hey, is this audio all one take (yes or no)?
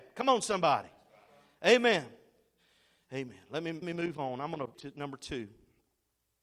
no